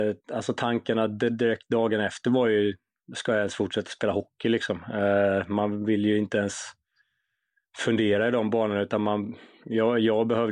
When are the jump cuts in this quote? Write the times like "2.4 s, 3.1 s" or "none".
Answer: none